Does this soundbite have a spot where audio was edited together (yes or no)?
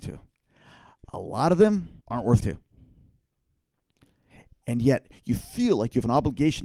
yes